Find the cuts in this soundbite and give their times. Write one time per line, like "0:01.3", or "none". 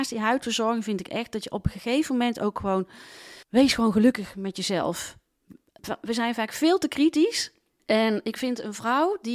0:03.4